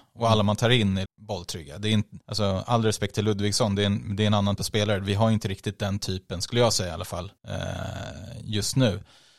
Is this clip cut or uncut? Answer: cut